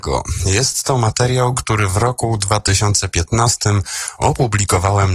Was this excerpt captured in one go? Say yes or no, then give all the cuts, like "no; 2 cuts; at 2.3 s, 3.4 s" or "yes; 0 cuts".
yes; 0 cuts